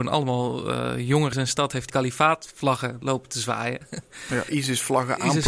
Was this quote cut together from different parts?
yes; 3 cuts; at 1.3 s, 1.9 s, 4.5 s

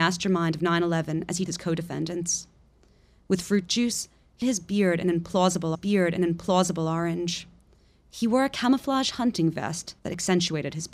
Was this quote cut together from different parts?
yes; 4 cuts; at 1.5 s, 4.4 s, 5.7 s, 10.0 s

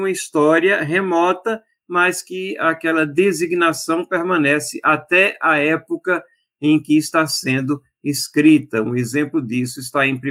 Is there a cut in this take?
no; 0 cuts

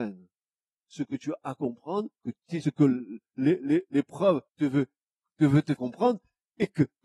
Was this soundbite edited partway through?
yes; 4 cuts; at 2.2 s, 2.6 s, 4.5 s, 5.8 s

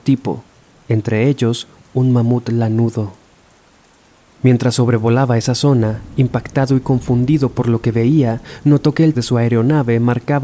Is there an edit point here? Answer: yes; 1 cut; at 9.1 s

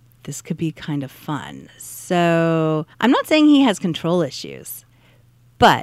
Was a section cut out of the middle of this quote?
yes; 1 cut; at 2.9 s

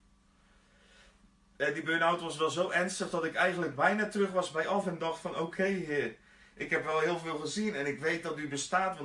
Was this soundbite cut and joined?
no; 0 cuts

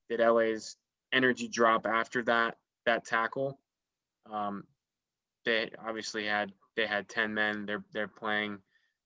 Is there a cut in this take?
no; 0 cuts

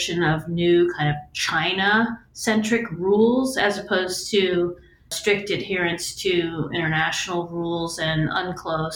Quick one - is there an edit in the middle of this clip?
no; 0 cuts

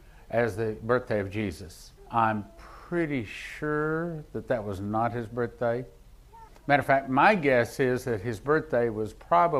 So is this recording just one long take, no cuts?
no; 2 cuts; at 2.0 s, 6.5 s

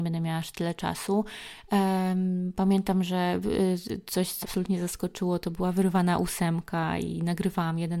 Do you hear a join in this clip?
yes; 1 cut; at 4.4 s

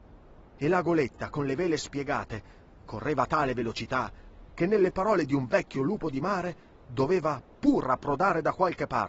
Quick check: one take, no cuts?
yes; 0 cuts

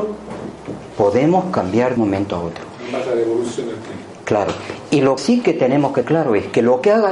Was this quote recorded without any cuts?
no; 3 cuts; at 2.0 s, 5.2 s, 6.0 s

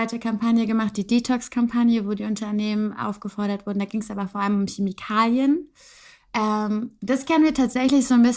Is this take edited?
no; 0 cuts

